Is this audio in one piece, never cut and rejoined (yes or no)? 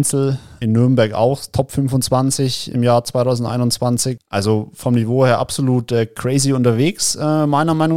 yes